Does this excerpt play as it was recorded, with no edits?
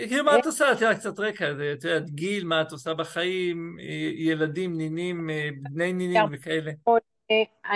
yes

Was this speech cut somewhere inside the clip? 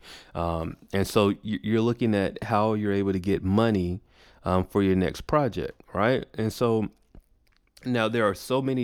no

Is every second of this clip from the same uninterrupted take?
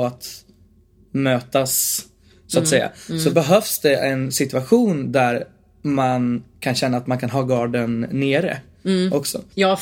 yes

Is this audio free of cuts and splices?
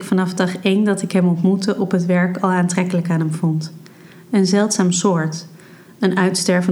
yes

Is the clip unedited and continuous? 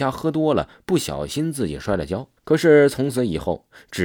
no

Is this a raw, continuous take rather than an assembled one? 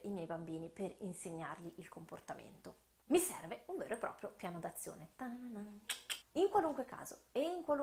no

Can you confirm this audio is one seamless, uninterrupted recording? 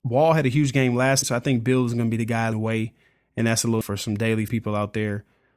no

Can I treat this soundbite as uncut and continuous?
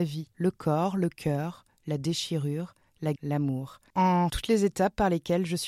no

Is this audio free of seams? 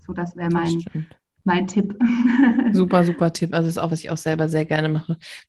no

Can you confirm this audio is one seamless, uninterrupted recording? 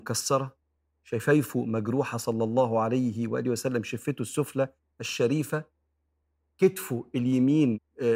yes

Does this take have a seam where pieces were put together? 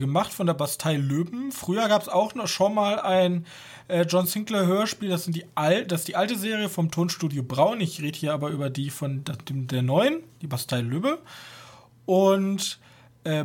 no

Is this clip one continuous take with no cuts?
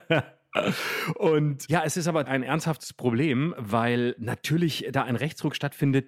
no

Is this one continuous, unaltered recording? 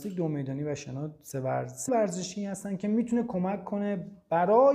no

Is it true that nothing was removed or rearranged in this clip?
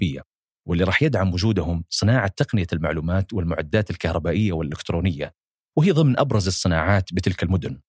yes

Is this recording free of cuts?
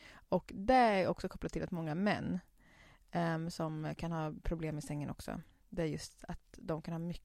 yes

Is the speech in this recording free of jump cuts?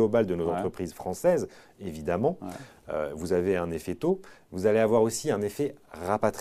yes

